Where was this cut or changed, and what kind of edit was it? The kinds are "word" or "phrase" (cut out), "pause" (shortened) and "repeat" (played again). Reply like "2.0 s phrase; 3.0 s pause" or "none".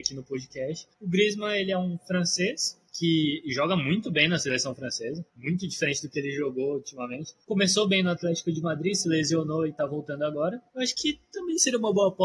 0.9 s pause; 2.8 s pause; 5.3 s pause; 7.4 s pause; 10.7 s pause

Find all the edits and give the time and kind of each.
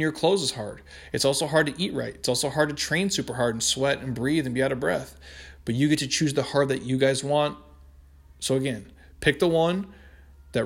none

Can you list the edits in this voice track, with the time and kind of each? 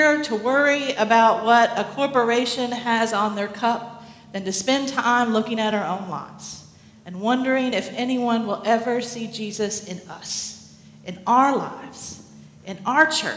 none

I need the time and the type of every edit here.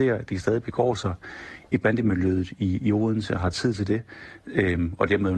none

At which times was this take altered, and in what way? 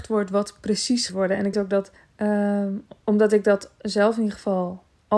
1.1 s phrase; 1.5 s word; 2.0 s pause

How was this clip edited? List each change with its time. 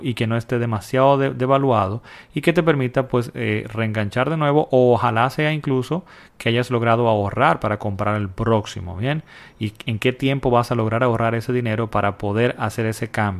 none

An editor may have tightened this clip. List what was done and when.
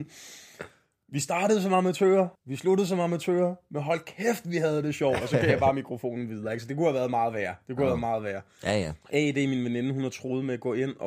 2.3 s pause; 9.0 s pause

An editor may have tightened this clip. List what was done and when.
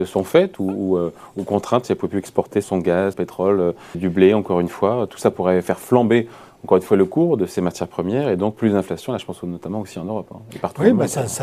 2.6 s word; 3.1 s word; 3.9 s word

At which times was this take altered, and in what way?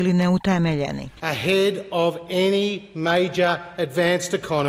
none

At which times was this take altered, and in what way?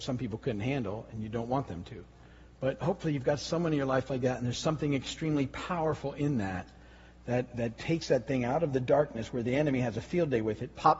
none

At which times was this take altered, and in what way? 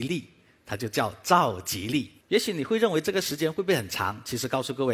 2.2 s pause

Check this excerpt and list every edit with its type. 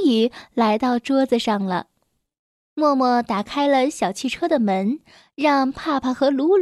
none

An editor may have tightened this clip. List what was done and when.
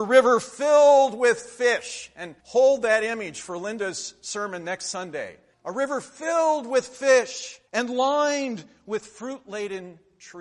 2.4 s pause; 5.5 s pause; 7.7 s pause

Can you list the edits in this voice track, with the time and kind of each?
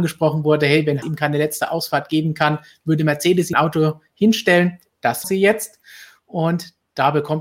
1.0 s word; 3.5 s word; 5.2 s word

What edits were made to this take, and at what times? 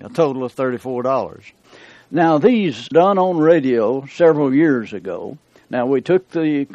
2.9 s word

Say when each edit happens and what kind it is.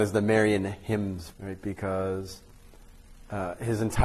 1.3 s word

